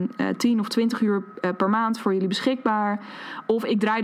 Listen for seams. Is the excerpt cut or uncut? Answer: uncut